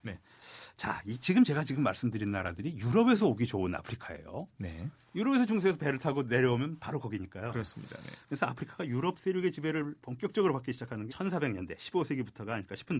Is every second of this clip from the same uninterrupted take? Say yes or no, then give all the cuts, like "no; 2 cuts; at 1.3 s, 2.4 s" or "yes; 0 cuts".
no; 1 cut; at 11.1 s